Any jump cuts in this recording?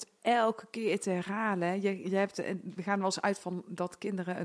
no; 0 cuts

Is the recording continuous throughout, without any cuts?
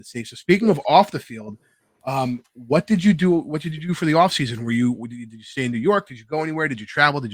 yes; 0 cuts

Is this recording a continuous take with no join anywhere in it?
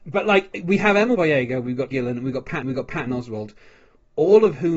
no; 3 cuts; at 1.1 s, 1.9 s, 2.6 s

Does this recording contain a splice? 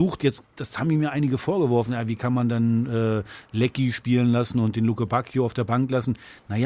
no; 0 cuts

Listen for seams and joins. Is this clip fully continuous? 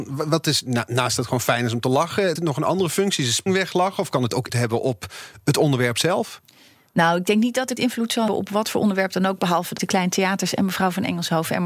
no; 6 cuts; at 2.4 s, 3.5 s, 4.5 s, 7.8 s, 8.3 s, 9.8 s

